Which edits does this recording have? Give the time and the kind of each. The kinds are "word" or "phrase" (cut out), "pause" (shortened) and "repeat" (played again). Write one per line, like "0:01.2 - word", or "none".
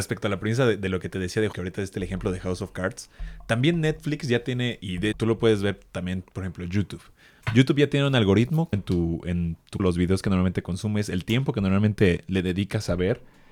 0:01.5 - word
0:05.1 - word
0:08.7 - phrase
0:09.8 - word